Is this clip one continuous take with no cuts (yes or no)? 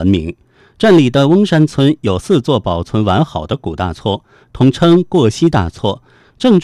yes